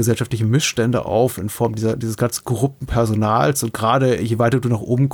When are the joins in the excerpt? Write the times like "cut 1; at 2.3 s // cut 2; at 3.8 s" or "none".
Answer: none